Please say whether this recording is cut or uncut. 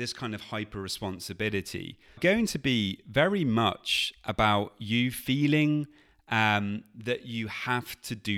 cut